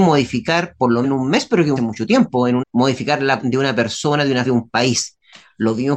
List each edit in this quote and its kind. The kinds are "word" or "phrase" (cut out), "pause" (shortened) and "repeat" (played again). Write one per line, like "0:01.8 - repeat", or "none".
0:01.0 - word
0:01.8 - word
0:02.6 - word
0:03.4 - word
0:04.5 - word